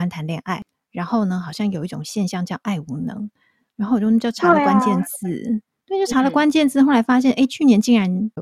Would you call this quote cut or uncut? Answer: uncut